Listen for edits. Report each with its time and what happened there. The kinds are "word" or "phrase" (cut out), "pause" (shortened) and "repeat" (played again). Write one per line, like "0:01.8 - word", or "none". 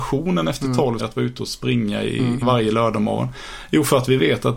0:01.0 - word
0:02.4 - phrase